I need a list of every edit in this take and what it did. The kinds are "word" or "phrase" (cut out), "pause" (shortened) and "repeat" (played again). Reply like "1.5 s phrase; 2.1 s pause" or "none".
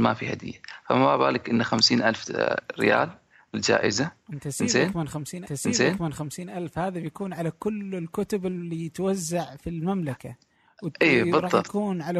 5.5 s repeat